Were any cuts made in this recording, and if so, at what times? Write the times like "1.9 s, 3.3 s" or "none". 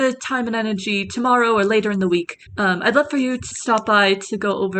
2.5 s, 3.5 s